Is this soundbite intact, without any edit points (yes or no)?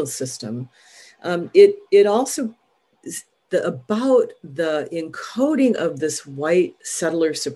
no